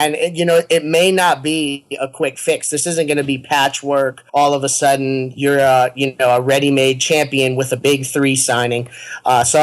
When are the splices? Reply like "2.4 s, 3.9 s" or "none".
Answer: 4.3 s